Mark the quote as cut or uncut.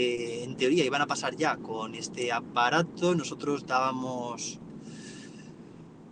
uncut